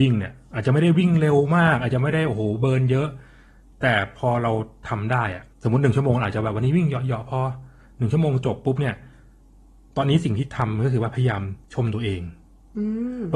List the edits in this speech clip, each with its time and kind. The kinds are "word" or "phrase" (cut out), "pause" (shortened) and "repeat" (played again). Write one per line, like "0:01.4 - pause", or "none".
0:05.5 - pause
0:11.6 - pause